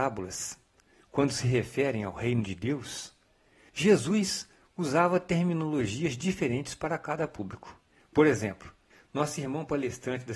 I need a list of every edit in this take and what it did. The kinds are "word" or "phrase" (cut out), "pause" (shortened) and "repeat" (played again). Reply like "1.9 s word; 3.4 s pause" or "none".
7.9 s pause